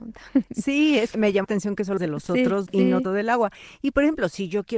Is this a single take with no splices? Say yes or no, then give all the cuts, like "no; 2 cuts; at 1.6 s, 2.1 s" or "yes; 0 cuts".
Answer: no; 5 cuts; at 1.1 s, 1.4 s, 2.0 s, 2.7 s, 3.0 s